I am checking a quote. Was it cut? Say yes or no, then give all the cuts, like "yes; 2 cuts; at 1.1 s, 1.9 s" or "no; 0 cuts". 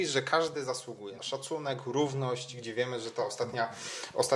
yes; 1 cut; at 1.2 s